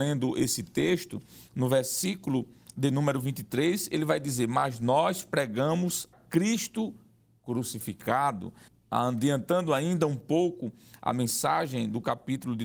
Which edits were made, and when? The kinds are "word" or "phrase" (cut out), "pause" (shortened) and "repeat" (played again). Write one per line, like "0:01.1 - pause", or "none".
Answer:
0:06.1 - word
0:08.7 - pause